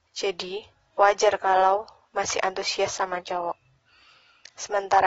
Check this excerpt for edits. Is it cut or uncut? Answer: uncut